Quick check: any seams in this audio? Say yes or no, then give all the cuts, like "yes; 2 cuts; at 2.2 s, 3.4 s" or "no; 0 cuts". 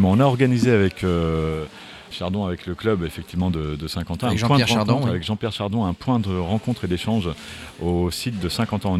yes; 1 cut; at 2.1 s